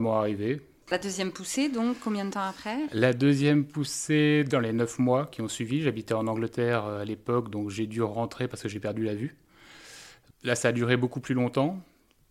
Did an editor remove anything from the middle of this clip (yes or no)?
no